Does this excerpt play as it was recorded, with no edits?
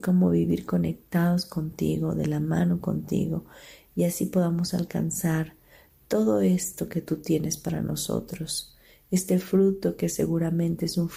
yes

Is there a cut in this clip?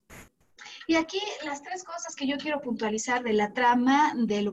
no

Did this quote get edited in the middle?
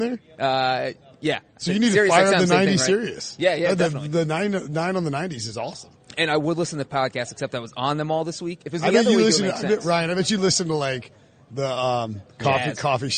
no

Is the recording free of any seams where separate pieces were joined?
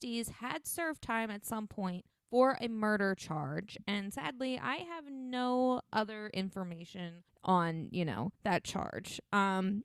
no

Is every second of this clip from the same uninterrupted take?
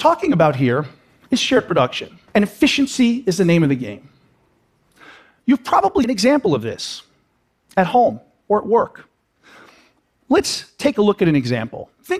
no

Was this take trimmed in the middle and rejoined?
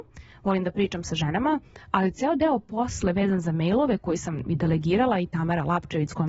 no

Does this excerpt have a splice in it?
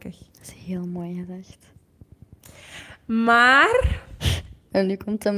no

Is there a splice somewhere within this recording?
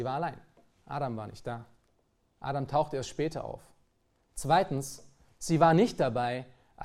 no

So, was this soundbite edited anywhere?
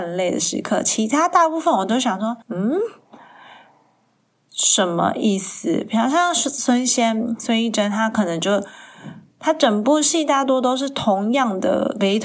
yes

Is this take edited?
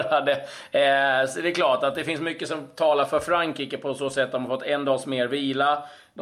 no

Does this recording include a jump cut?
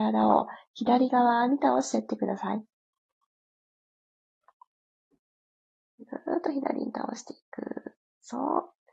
no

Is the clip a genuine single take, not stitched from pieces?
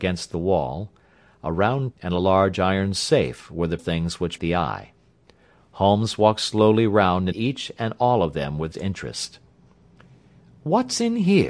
no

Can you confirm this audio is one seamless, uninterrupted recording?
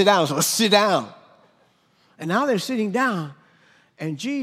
yes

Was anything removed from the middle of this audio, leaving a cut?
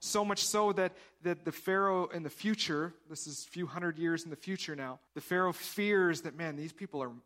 yes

